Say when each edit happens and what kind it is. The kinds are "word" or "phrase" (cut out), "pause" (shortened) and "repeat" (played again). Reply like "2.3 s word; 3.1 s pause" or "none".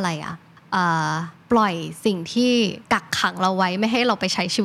1.4 s pause; 2.8 s pause